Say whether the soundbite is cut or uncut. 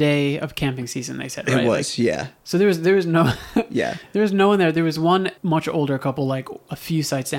cut